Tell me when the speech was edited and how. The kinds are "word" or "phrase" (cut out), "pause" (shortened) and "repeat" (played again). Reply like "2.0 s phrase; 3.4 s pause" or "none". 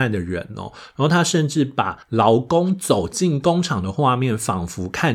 2.0 s pause